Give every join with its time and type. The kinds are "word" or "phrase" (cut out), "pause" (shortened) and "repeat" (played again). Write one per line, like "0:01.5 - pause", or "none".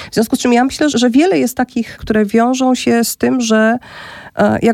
0:00.9 - word
0:02.0 - phrase